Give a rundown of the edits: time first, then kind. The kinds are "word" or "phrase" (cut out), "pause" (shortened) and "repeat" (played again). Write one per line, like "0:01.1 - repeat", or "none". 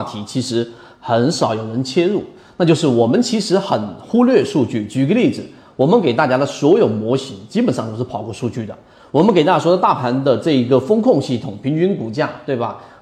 none